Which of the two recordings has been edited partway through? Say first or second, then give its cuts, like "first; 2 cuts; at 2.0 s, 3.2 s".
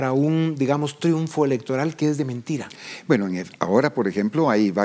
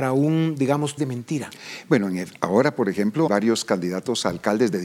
second; 2 cuts; at 1.0 s, 3.3 s